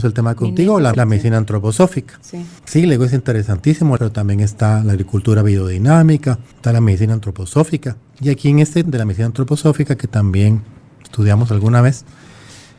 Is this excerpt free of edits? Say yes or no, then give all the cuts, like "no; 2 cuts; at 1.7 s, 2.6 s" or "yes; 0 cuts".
no; 6 cuts; at 0.9 s, 2.6 s, 4.0 s, 6.5 s, 8.1 s, 8.8 s